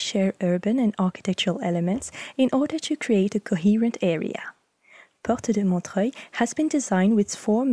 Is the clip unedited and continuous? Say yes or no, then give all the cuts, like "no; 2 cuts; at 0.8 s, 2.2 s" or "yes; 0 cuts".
yes; 0 cuts